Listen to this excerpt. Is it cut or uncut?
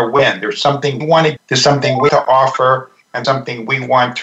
cut